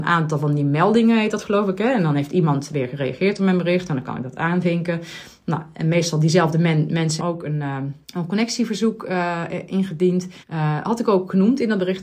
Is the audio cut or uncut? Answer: cut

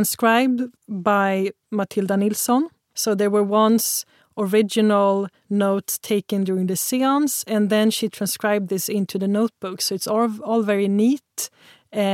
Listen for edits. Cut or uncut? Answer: uncut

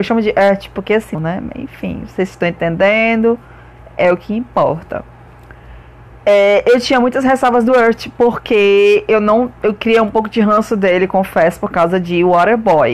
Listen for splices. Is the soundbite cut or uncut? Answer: uncut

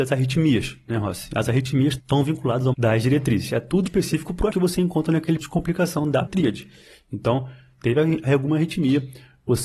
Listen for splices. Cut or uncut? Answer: cut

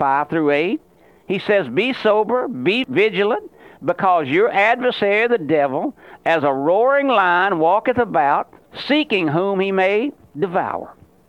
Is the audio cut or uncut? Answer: uncut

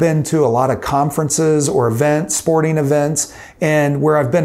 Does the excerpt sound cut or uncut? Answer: uncut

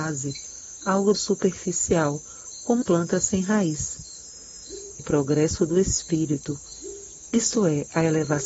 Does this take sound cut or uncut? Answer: cut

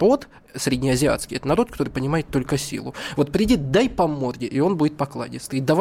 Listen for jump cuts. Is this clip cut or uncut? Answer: uncut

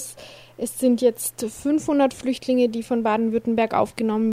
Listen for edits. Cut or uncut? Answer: uncut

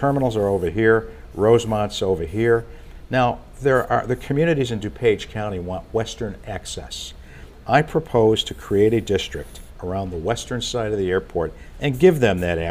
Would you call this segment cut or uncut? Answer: uncut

